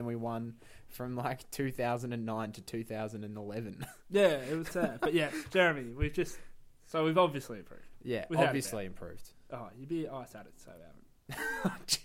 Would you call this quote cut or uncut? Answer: cut